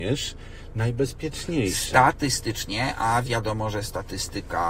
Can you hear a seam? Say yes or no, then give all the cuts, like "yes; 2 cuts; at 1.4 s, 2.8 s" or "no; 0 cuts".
no; 0 cuts